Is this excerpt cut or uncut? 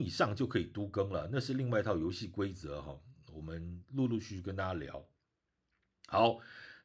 uncut